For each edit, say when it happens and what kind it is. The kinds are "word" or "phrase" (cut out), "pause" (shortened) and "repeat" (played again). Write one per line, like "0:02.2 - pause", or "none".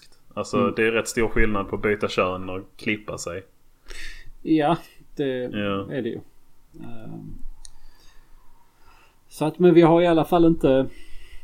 none